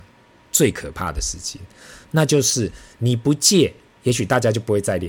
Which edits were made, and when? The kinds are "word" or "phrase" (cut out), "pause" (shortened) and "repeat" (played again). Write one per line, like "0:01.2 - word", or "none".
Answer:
none